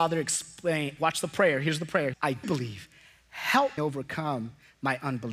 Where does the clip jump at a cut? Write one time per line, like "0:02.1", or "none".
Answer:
0:01.0
0:02.1
0:02.4
0:03.8